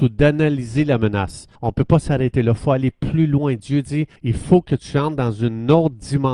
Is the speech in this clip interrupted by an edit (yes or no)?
yes